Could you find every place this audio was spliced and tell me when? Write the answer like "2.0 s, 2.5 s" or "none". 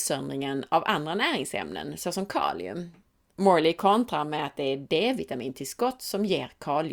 none